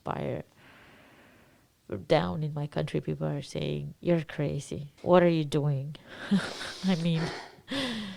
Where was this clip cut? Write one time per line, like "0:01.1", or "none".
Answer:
0:04.0
0:05.0